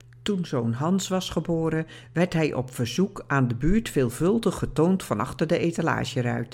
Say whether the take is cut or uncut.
uncut